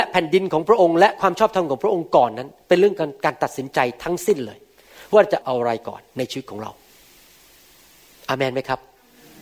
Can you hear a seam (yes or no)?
no